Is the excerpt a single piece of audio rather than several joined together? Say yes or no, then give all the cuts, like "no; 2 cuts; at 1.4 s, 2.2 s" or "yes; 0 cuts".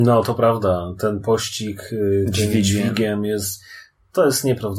yes; 0 cuts